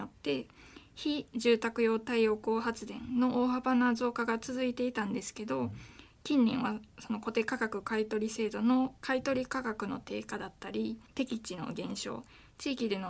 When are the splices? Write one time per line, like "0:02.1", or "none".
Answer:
0:11.1